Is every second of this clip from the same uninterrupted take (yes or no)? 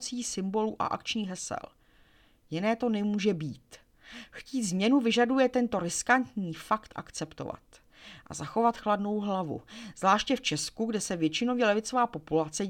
yes